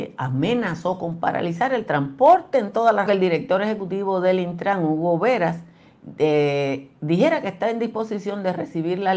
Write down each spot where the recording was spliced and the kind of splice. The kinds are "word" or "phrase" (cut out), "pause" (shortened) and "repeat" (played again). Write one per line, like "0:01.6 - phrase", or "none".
0:03.1 - phrase